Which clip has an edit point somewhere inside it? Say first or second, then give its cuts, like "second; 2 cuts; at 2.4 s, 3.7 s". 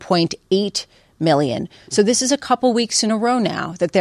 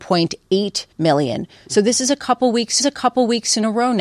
second; 2 cuts; at 0.9 s, 2.8 s